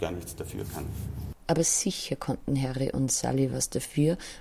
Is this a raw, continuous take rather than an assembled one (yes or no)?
yes